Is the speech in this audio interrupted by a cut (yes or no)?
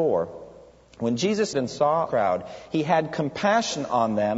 yes